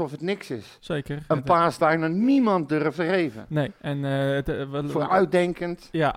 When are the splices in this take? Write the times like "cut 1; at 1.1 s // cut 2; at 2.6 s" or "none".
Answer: cut 1; at 1.8 s // cut 2; at 2.7 s // cut 3; at 3.8 s